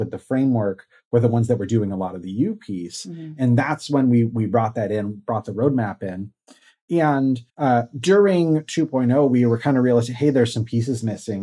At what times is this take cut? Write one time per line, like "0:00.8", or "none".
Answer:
0:07.5